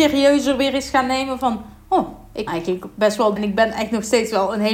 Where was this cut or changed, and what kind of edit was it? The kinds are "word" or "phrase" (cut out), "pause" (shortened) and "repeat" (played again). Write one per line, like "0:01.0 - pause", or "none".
0:02.5 - word
0:03.4 - word